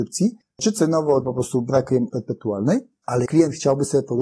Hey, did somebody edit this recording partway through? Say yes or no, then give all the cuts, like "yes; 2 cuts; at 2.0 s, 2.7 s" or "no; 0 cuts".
yes; 3 cuts; at 1.2 s, 2.1 s, 3.3 s